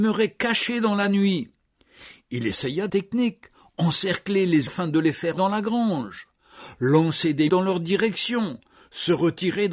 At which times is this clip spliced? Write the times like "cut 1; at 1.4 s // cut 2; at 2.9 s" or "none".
cut 1; at 2.9 s // cut 2; at 4.7 s // cut 3; at 5.4 s // cut 4; at 7.5 s